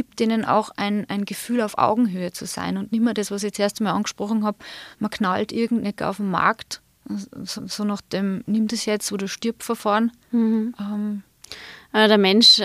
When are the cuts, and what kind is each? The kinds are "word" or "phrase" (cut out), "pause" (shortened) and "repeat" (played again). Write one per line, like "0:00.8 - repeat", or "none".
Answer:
0:04.9 - pause
0:06.0 - word
0:07.6 - repeat
0:10.2 - pause